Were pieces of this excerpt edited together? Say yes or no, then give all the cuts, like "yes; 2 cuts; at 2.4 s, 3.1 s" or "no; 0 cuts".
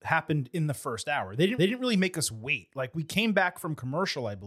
yes; 1 cut; at 1.6 s